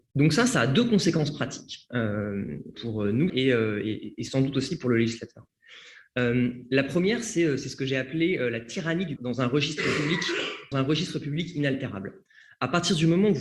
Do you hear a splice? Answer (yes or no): yes